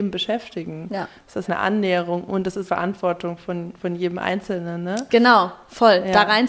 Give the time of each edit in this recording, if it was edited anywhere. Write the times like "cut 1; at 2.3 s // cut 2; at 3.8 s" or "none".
cut 1; at 1.5 s // cut 2; at 2.7 s